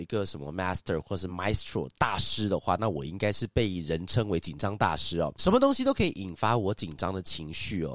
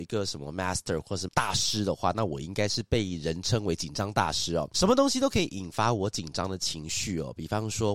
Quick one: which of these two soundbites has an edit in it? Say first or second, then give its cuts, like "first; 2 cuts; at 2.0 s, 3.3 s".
second; 1 cut; at 1.3 s